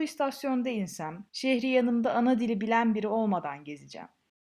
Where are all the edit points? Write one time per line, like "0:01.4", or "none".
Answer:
0:01.3